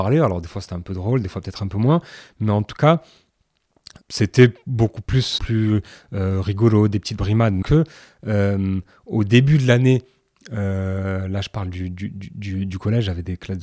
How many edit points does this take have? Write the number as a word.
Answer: three